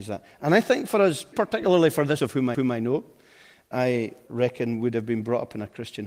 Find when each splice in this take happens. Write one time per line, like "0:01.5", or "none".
0:01.3
0:02.2
0:02.5
0:03.7
0:04.3